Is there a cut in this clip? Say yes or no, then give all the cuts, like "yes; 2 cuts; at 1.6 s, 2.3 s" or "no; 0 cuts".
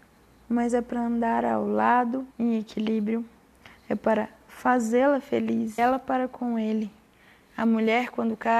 yes; 3 cuts; at 2.3 s, 3.8 s, 5.8 s